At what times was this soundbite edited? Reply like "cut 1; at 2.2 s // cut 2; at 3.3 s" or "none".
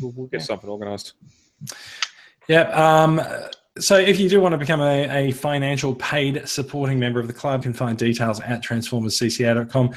cut 1; at 7.6 s